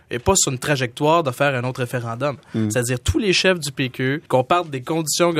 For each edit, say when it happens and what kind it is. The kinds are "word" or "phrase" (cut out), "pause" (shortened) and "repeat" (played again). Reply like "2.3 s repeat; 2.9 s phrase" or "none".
4.3 s pause